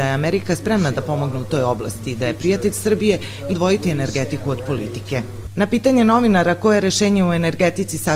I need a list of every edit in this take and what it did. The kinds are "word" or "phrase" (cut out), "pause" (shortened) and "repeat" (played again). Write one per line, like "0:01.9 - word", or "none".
0:03.5 - phrase